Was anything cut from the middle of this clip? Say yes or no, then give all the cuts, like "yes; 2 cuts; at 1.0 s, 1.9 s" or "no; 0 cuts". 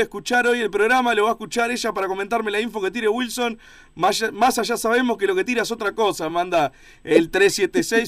no; 0 cuts